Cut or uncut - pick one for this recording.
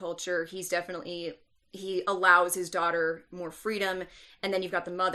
uncut